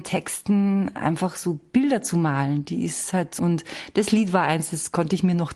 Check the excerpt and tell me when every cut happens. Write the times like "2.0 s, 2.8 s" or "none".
3.4 s